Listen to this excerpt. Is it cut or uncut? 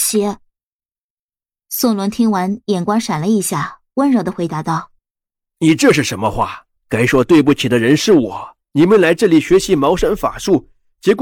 cut